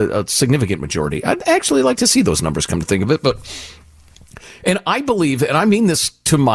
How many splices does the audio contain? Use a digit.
0